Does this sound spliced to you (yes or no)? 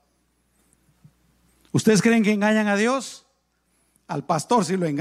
no